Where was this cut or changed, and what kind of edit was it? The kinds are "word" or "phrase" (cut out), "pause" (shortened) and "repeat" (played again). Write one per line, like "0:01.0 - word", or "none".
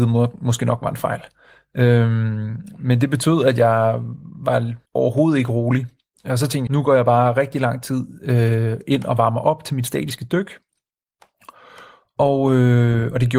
0:04.9 - pause
0:06.7 - word